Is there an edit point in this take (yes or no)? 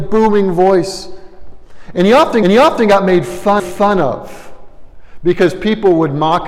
yes